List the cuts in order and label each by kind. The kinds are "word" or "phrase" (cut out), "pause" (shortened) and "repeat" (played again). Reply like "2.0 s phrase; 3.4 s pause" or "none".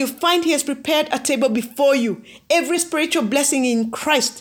none